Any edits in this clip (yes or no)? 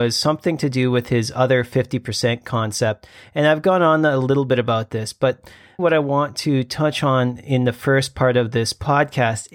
yes